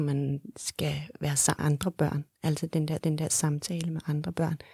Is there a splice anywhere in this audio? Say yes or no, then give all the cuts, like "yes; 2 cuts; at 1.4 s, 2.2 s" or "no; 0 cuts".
yes; 2 cuts; at 1.6 s, 3.0 s